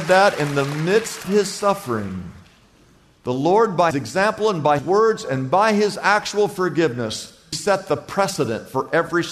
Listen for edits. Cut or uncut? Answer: cut